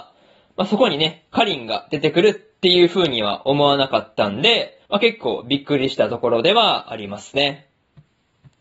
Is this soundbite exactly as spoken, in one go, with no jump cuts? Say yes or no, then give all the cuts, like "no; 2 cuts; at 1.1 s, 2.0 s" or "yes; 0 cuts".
no; 1 cut; at 4.8 s